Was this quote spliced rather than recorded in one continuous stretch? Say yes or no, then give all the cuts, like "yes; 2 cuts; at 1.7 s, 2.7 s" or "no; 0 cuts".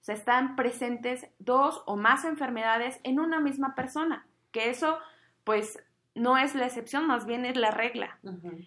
no; 0 cuts